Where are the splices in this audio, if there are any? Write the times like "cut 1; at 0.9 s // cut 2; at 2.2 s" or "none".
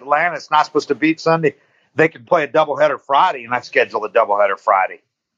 cut 1; at 1.2 s // cut 2; at 2.2 s // cut 3; at 3.6 s